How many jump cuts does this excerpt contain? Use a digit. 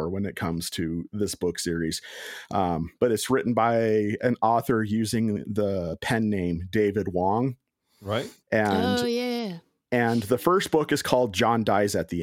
1